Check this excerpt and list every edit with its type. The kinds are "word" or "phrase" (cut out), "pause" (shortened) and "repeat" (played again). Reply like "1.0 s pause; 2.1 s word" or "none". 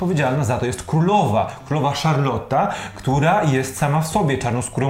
none